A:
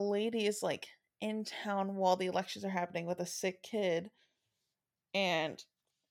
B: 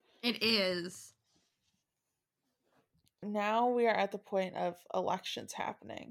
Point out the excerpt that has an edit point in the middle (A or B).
B